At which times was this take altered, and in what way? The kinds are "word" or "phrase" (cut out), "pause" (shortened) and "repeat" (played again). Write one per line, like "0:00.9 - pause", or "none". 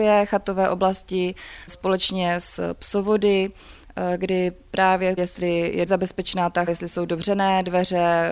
0:05.2 - word
0:05.9 - word
0:06.7 - word